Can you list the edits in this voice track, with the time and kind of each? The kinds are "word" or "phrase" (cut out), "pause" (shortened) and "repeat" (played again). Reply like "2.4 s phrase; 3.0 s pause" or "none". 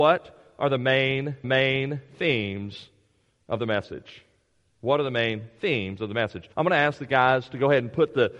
1.4 s repeat; 6.5 s pause